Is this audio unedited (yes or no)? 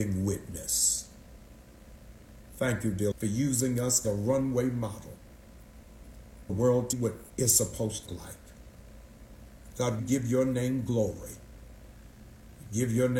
no